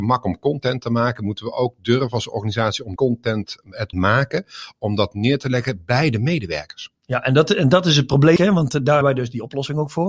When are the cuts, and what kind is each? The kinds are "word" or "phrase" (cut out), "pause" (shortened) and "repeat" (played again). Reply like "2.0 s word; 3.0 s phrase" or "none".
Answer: 3.0 s word; 3.9 s word; 8.4 s word; 9.0 s word